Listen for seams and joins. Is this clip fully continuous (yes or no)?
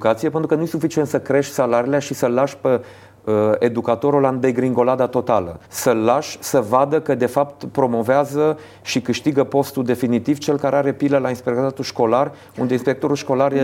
no